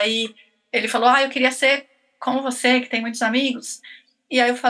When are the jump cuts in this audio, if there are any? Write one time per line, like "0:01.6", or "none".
none